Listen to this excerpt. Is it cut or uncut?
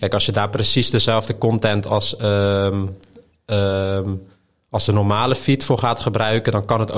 uncut